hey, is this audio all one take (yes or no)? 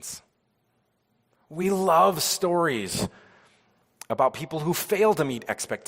yes